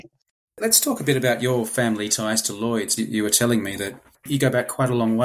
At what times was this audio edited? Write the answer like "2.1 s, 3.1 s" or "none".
3.0 s